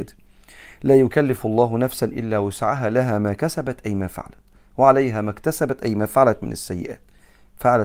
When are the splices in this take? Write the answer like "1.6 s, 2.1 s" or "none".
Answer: none